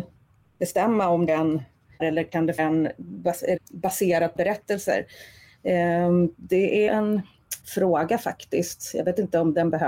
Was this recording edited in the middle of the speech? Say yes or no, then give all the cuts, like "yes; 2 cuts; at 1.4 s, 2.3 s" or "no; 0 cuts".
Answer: yes; 7 cuts; at 1.3 s, 2.0 s, 2.6 s, 3.6 s, 4.4 s, 6.9 s, 7.6 s